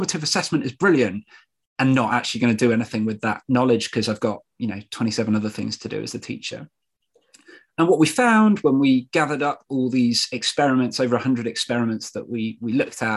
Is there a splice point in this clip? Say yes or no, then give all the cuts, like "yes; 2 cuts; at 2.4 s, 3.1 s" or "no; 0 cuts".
no; 0 cuts